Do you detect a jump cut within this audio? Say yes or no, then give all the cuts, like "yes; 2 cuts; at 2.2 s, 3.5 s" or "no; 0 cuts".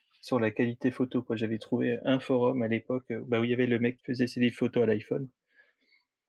yes; 1 cut; at 4.0 s